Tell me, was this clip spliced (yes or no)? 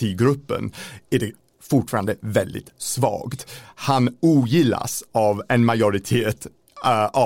no